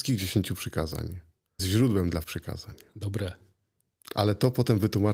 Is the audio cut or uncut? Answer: cut